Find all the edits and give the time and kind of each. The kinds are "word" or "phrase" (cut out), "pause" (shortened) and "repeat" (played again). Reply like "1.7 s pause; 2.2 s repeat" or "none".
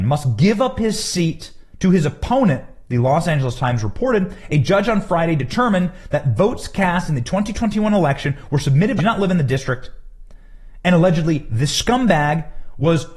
1.7 s pause; 9.0 s phrase